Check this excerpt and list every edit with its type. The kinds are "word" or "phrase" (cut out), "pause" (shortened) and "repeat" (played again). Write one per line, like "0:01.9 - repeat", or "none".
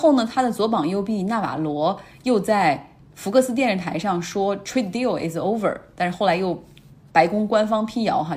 0:03.0 - pause